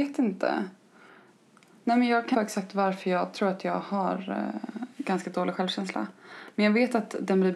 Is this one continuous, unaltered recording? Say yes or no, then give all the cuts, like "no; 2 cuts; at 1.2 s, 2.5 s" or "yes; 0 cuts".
no; 1 cut; at 2.3 s